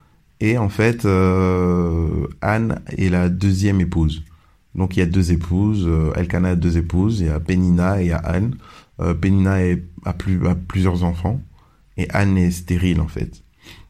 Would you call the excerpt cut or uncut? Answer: uncut